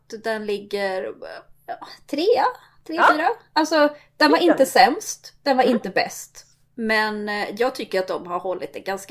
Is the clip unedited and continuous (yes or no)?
yes